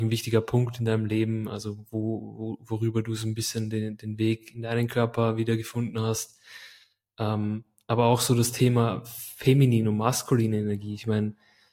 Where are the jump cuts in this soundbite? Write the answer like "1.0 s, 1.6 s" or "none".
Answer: none